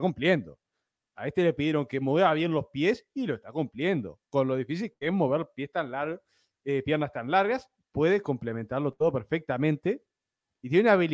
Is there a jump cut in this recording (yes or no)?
no